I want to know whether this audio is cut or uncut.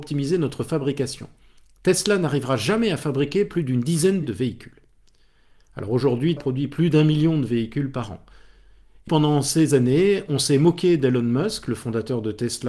cut